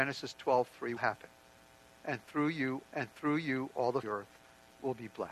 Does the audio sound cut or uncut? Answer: cut